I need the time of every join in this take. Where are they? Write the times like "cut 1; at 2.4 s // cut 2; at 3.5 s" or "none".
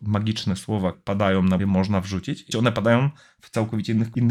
cut 1; at 0.9 s // cut 2; at 1.6 s // cut 3; at 2.5 s